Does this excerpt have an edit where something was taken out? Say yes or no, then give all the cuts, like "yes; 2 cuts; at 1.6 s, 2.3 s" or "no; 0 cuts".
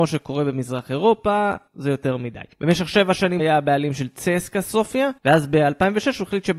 yes; 4 cuts; at 1.7 s, 2.5 s, 3.4 s, 5.2 s